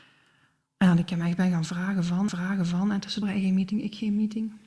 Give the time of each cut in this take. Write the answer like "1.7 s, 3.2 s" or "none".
2.3 s, 3.2 s